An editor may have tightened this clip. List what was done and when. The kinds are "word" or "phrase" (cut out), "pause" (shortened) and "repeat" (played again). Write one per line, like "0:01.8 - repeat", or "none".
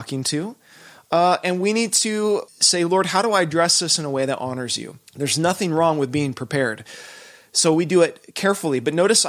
0:02.5 - word
0:05.1 - pause